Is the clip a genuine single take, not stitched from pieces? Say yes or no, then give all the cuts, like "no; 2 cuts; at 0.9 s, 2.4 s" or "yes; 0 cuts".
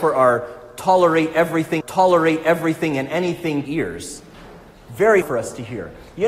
no; 3 cuts; at 1.8 s, 3.7 s, 5.2 s